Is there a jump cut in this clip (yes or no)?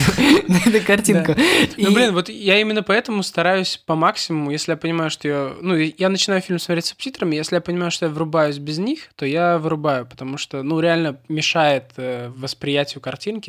no